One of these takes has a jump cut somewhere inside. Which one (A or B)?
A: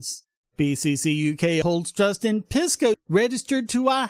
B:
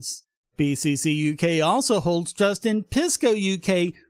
A